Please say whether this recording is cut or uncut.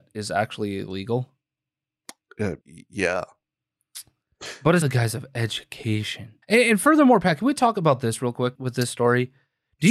cut